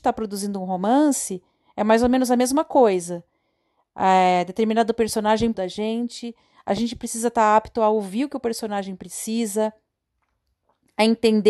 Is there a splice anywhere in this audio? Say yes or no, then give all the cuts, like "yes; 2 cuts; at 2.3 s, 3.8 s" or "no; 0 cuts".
yes; 1 cut; at 5.5 s